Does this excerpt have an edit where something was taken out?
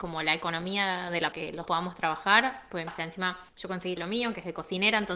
yes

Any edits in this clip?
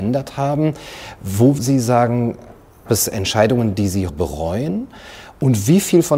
yes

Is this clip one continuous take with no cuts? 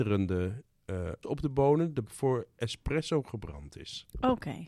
no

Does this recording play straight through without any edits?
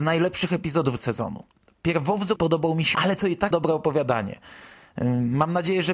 no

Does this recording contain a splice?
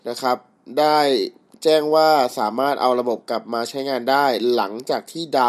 no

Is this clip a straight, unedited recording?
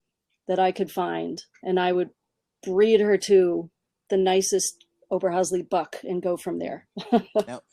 yes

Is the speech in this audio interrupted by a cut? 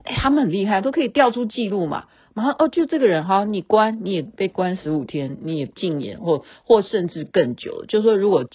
no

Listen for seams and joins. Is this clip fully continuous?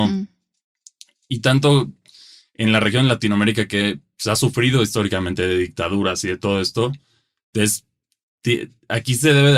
yes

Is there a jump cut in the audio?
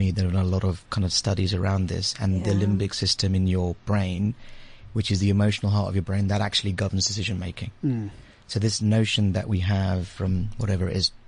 no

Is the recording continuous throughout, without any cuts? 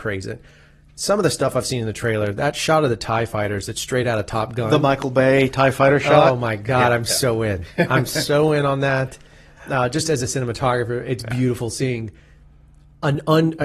yes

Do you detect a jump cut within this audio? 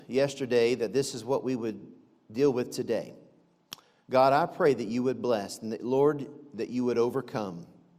no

